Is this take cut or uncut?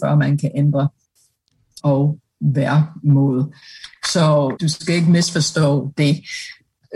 cut